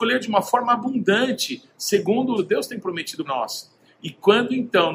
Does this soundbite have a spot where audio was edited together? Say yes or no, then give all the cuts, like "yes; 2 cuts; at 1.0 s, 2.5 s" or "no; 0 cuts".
yes; 2 cuts; at 2.4 s, 3.3 s